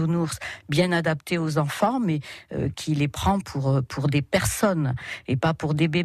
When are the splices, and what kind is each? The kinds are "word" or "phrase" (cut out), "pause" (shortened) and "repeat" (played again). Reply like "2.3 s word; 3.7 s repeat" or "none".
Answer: 2.7 s word